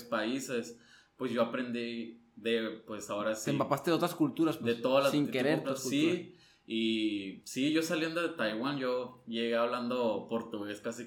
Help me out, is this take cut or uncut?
cut